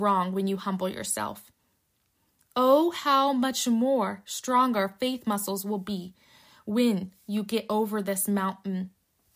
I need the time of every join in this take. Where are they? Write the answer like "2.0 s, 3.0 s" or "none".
none